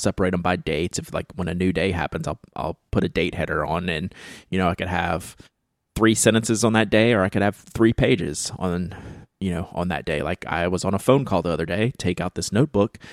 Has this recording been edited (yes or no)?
no